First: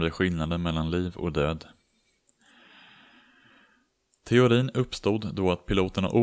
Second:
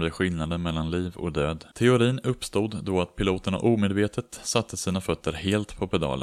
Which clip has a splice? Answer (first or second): second